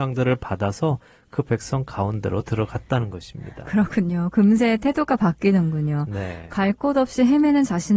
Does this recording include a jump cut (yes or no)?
no